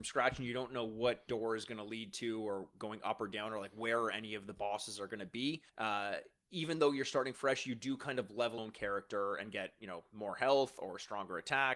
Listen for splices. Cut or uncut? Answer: cut